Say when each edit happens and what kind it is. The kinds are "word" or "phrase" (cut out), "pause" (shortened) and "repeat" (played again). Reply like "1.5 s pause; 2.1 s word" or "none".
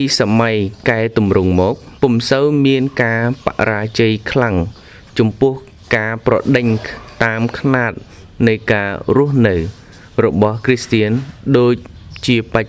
2.0 s pause